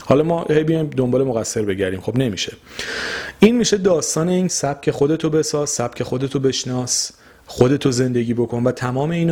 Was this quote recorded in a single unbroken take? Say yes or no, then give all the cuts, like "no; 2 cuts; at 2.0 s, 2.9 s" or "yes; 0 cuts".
no; 1 cut; at 4.5 s